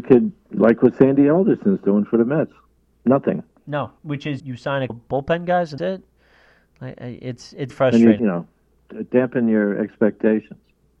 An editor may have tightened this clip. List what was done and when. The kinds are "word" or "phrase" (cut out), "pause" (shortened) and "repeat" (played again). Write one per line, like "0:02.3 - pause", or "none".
0:02.7 - pause
0:04.0 - pause
0:04.4 - word
0:04.9 - word
0:05.8 - word
0:07.7 - word
0:08.2 - phrase
0:09.1 - word